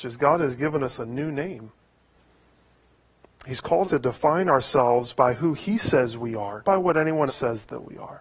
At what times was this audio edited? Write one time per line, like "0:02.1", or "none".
0:03.8
0:06.6
0:07.3